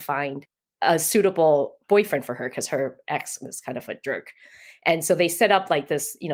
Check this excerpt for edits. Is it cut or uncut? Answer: uncut